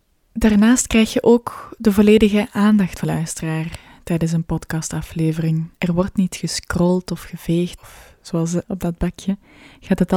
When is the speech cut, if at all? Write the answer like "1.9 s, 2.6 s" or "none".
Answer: 3.0 s, 5.7 s, 7.8 s, 8.6 s